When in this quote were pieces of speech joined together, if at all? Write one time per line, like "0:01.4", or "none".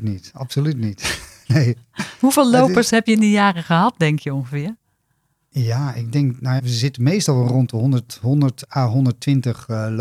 0:03.1
0:06.6